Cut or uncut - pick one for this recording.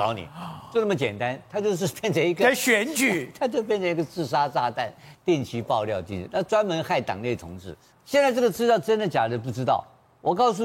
uncut